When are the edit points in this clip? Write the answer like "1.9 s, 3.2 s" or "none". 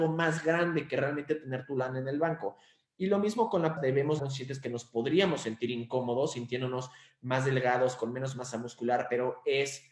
3.8 s, 4.2 s

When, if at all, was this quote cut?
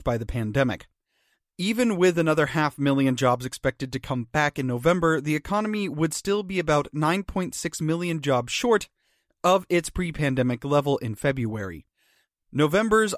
none

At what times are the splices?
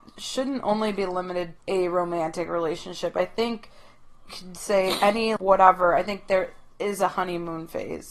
1.6 s, 4.3 s, 5.4 s

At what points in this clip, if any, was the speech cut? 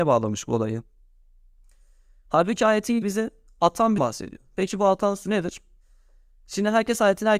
3.0 s, 4.0 s

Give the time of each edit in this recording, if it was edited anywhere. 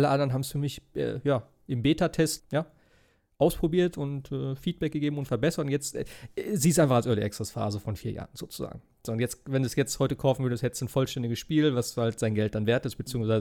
2.4 s

